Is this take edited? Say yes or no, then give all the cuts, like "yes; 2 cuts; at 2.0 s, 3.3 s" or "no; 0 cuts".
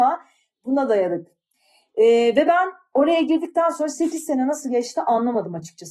no; 0 cuts